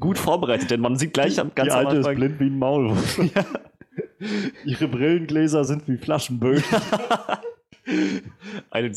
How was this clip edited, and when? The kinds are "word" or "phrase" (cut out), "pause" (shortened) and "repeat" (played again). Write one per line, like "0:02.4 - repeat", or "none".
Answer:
none